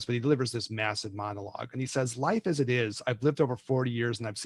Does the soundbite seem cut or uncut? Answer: uncut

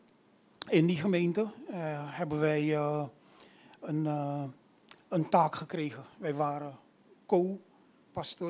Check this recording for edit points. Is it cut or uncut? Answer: uncut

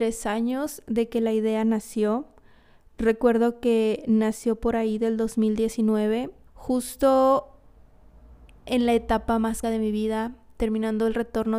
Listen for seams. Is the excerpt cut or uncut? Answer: cut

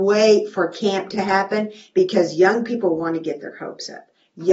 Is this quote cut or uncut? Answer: uncut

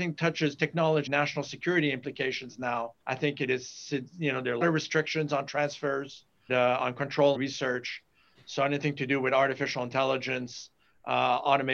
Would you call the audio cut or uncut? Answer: cut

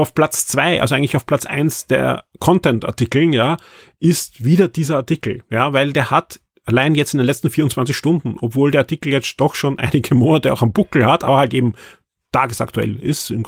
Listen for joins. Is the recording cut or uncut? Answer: uncut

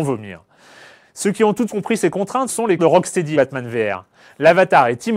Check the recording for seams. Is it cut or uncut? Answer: cut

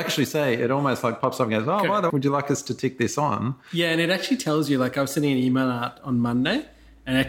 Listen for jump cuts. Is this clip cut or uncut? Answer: cut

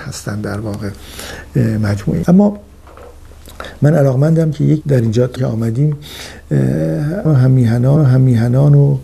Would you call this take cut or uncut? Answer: cut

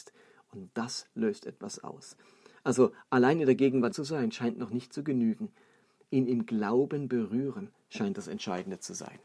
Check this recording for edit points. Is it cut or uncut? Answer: cut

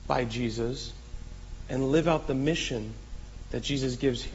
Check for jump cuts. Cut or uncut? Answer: uncut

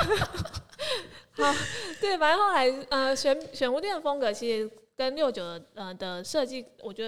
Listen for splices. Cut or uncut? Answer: uncut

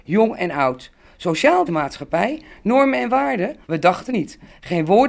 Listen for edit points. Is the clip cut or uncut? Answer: cut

